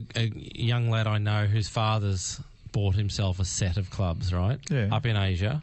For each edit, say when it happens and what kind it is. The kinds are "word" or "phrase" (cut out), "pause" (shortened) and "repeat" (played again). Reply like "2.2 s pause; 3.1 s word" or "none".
none